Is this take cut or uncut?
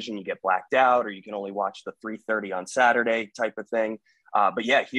uncut